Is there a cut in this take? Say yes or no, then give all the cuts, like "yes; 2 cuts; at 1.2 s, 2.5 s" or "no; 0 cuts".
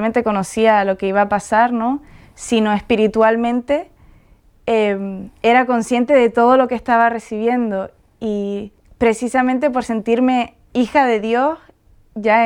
no; 0 cuts